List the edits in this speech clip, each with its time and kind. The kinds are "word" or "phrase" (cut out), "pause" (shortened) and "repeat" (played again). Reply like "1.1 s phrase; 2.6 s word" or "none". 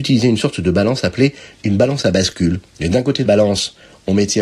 2.7 s pause; 3.2 s word